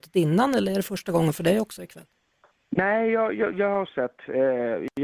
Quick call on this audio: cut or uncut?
uncut